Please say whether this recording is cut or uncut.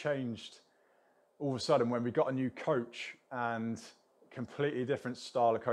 uncut